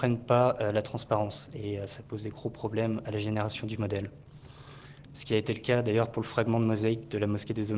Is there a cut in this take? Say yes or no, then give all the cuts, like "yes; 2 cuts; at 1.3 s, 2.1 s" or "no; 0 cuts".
no; 0 cuts